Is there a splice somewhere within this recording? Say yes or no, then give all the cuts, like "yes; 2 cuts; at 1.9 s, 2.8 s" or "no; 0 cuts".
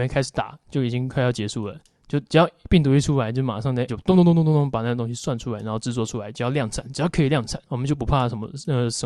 yes; 3 cuts; at 2.3 s, 3.9 s, 7.7 s